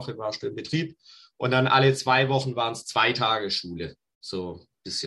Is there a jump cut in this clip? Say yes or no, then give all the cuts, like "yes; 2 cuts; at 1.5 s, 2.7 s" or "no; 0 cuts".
no; 0 cuts